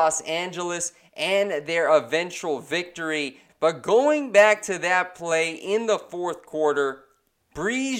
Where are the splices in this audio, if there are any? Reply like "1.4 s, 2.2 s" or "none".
none